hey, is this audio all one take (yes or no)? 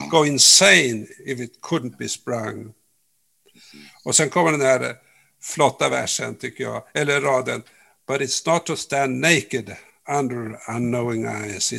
yes